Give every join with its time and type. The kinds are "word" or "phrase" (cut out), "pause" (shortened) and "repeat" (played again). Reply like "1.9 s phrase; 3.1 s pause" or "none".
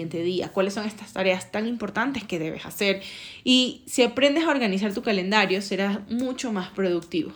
none